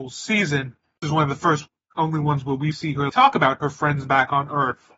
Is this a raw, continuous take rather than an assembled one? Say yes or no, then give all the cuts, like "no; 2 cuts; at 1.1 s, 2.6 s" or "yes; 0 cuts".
no; 3 cuts; at 1.0 s, 2.7 s, 3.1 s